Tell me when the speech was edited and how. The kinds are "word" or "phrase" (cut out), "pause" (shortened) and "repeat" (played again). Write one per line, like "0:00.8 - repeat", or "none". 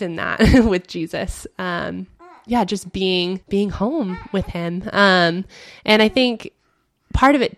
0:03.4 - pause